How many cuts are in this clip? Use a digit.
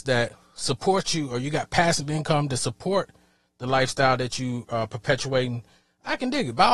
0